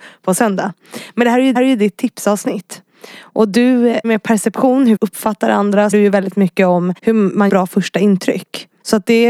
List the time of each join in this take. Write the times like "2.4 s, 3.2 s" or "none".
1.6 s, 4.0 s, 5.0 s, 5.9 s, 7.0 s, 7.5 s